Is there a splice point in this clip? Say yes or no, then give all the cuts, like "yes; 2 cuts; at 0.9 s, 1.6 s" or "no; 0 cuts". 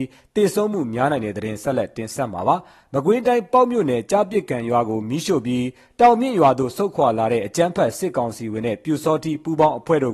no; 0 cuts